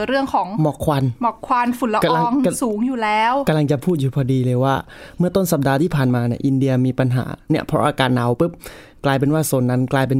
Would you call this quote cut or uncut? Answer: uncut